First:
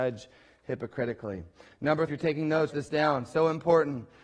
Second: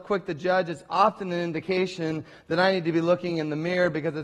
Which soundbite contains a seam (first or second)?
first